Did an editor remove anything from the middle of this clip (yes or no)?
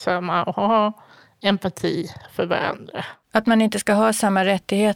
no